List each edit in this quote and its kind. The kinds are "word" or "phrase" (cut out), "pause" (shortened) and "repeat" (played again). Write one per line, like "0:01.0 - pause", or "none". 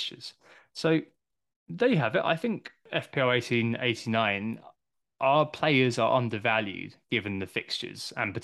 none